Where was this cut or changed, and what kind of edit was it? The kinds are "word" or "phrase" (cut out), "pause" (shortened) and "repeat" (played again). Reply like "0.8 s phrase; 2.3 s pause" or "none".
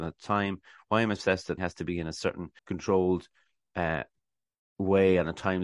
1.6 s word; 2.6 s pause